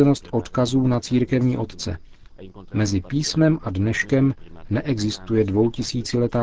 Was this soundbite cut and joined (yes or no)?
no